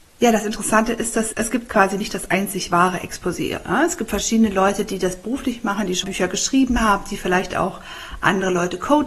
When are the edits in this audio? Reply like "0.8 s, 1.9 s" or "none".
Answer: 1.3 s, 6.0 s